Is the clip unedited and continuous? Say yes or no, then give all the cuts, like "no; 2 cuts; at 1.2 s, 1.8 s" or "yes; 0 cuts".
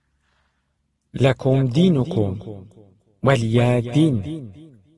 yes; 0 cuts